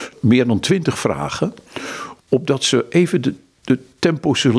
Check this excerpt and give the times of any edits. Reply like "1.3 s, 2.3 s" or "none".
2.2 s